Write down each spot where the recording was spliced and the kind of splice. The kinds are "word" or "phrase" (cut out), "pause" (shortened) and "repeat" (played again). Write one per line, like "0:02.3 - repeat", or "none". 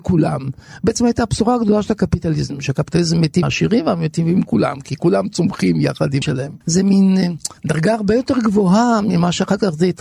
0:03.4 - word
0:06.2 - word
0:06.6 - pause
0:07.6 - pause